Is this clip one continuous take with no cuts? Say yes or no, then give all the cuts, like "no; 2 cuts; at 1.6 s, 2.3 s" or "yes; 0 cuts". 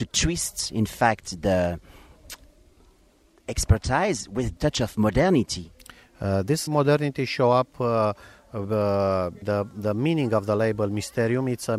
no; 3 cuts; at 4.6 s, 6.7 s, 9.4 s